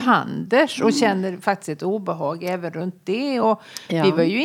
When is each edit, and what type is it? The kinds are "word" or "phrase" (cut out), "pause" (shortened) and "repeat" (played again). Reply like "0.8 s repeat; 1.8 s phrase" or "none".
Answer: none